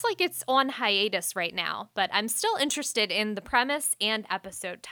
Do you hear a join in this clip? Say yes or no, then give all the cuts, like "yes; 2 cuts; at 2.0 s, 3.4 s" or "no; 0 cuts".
no; 0 cuts